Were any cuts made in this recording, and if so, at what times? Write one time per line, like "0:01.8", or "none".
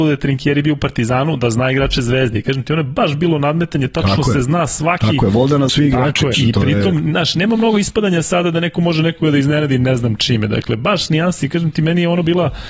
0:05.7
0:06.3